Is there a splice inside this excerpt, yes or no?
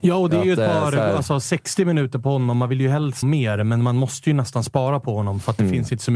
yes